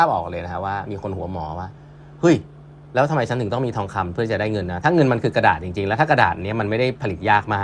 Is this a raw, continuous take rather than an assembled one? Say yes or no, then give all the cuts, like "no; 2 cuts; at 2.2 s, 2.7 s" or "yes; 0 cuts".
yes; 0 cuts